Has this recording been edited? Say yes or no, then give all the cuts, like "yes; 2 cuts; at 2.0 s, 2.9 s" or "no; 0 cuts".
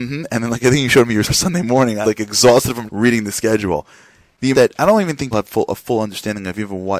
yes; 5 cuts; at 1.2 s, 2.0 s, 2.9 s, 4.5 s, 5.3 s